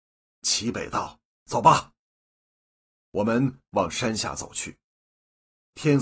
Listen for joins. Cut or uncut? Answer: uncut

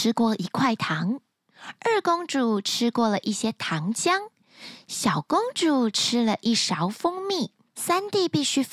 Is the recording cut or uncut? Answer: cut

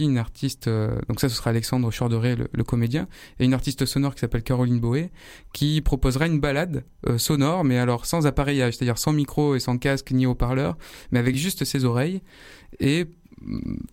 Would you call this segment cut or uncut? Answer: uncut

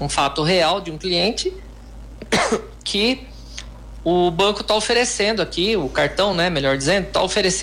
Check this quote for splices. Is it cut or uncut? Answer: uncut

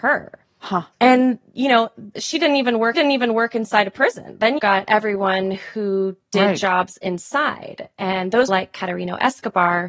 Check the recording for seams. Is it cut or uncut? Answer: cut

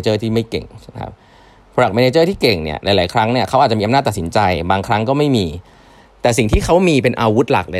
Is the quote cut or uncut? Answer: uncut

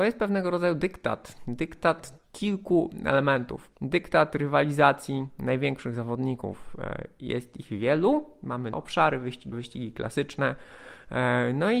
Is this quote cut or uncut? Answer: cut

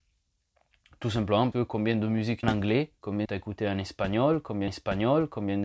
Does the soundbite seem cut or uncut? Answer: cut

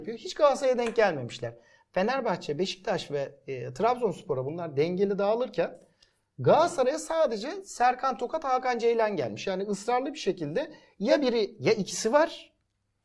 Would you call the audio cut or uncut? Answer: uncut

